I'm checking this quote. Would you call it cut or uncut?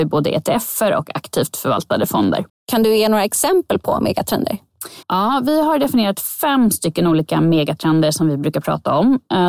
cut